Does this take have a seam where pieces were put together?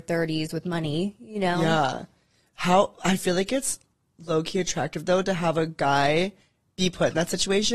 no; 0 cuts

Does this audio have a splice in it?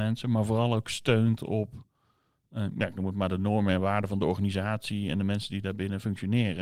no; 0 cuts

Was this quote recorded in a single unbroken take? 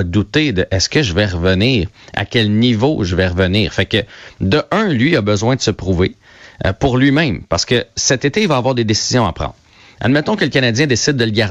yes; 0 cuts

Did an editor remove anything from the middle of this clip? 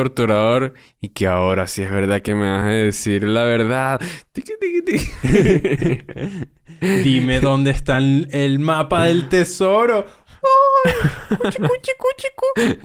no; 0 cuts

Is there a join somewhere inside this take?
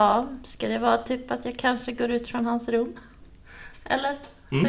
no; 0 cuts

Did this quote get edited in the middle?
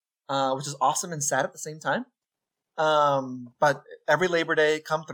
no; 0 cuts

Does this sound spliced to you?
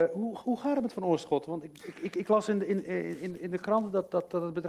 no; 0 cuts

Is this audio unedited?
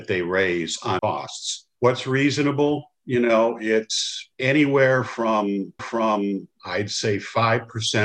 no; 4 cuts; at 1.0 s, 1.8 s, 4.3 s, 5.8 s

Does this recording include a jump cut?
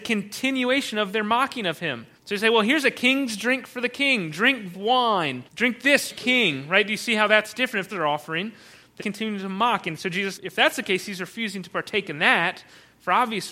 yes; 7 cuts; at 2.2 s, 4.7 s, 5.5 s, 6.1 s, 7.9 s, 9.0 s, 10.4 s

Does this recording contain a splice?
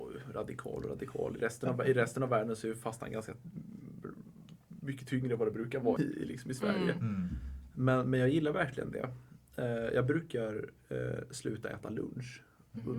yes; 1 cut; at 6.0 s

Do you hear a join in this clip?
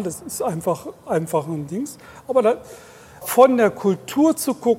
yes; 1 cut; at 3.2 s

